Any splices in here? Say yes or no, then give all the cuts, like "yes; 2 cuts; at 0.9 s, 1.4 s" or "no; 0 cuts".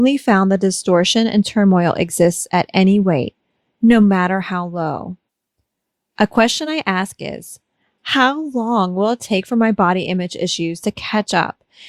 no; 0 cuts